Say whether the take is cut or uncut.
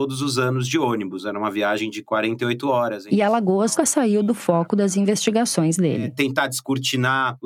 cut